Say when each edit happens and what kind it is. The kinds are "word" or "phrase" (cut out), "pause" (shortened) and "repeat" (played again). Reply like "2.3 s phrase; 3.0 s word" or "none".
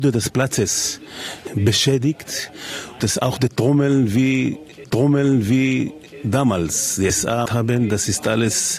3.0 s word; 4.8 s repeat; 7.5 s phrase